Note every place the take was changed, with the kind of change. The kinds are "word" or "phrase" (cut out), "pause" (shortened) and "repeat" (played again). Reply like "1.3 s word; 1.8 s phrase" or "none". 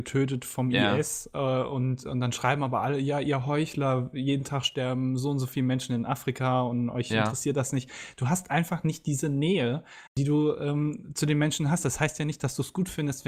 10.1 s pause

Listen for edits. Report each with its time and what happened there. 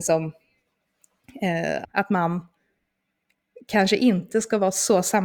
1.8 s phrase

